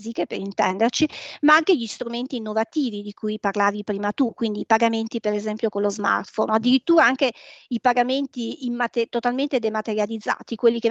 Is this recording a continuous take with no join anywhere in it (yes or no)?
yes